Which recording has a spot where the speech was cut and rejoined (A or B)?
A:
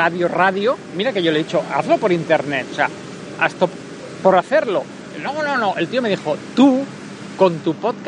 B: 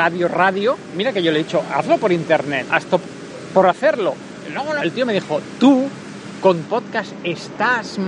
B